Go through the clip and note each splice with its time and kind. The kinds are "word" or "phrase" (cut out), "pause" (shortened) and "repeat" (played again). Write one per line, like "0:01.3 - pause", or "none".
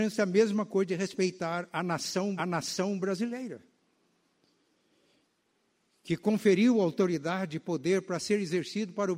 0:02.4 - repeat

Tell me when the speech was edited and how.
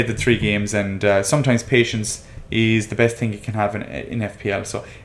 none

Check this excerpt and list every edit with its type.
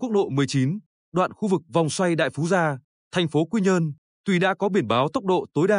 none

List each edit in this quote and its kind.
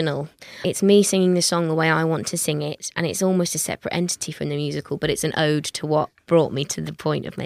none

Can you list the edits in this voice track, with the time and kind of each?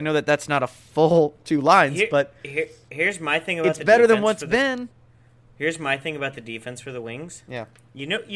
none

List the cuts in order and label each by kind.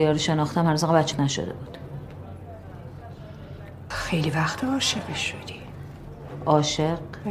0:01.1 - word
0:03.9 - word

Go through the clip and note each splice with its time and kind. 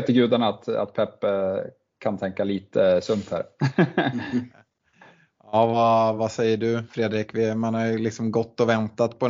none

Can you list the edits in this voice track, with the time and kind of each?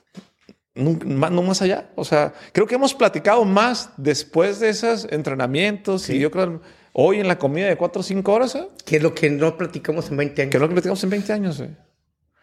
none

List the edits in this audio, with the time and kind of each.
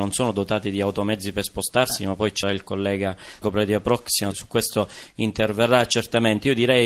0:02.4 - word
0:03.4 - word
0:04.3 - word

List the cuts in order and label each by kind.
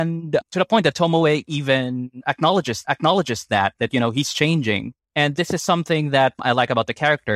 0:02.8 - repeat
0:05.0 - pause

